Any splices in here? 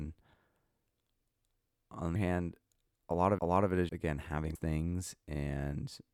yes; 4 cuts; at 2.2 s, 3.4 s, 3.9 s, 4.6 s

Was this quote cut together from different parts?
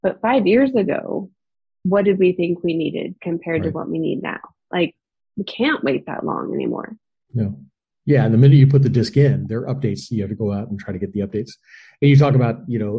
no; 0 cuts

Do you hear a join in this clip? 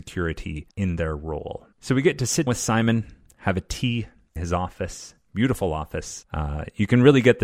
yes; 2 cuts; at 2.5 s, 4.4 s

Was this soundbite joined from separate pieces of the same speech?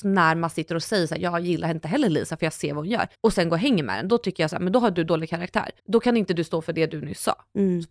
yes; 2 cuts; at 3.1 s, 5.8 s

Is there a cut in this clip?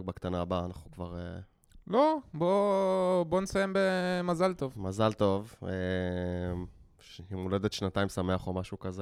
no; 0 cuts

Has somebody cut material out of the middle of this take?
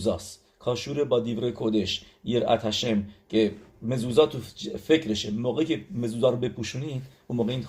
no; 0 cuts

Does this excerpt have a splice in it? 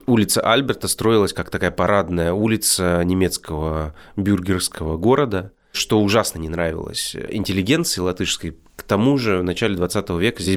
no; 0 cuts

